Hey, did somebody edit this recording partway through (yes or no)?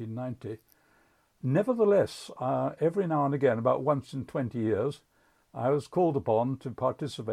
no